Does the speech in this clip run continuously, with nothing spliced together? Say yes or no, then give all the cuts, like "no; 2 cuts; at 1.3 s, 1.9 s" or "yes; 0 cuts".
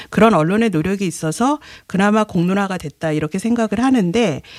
yes; 0 cuts